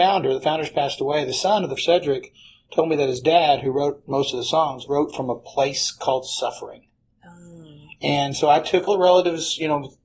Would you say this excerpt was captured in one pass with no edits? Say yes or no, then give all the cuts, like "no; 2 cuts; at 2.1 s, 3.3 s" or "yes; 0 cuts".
no; 3 cuts; at 1.8 s, 4.9 s, 8.9 s